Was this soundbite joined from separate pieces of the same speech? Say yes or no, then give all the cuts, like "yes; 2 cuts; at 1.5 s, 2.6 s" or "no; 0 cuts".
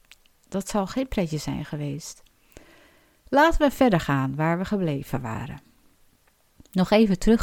no; 0 cuts